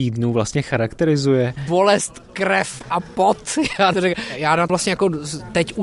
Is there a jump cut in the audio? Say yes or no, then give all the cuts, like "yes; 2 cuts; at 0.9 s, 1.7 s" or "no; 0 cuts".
yes; 2 cuts; at 3.9 s, 4.7 s